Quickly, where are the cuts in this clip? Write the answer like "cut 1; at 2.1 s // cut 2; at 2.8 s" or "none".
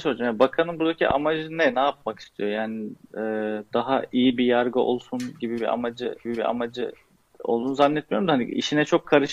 cut 1; at 6.3 s